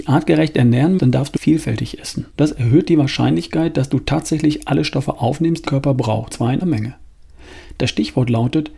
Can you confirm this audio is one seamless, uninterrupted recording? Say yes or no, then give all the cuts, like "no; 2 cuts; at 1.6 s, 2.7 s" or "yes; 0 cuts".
no; 6 cuts; at 1.0 s, 1.4 s, 2.3 s, 5.7 s, 6.3 s, 6.6 s